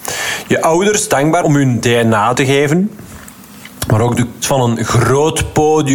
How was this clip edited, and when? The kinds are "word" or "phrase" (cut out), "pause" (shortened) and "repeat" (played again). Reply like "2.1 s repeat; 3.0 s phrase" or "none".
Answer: 1.4 s word; 2.3 s word; 4.4 s word